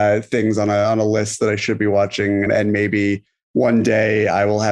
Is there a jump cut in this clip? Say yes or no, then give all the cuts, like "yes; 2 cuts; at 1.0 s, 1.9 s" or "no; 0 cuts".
yes; 1 cut; at 2.5 s